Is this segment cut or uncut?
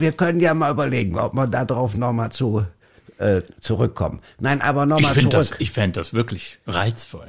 uncut